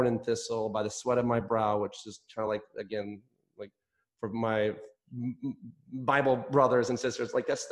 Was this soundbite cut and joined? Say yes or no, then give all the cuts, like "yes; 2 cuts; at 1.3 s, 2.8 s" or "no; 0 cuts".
no; 0 cuts